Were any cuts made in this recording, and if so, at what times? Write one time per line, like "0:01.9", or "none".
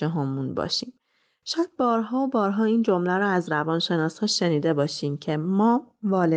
none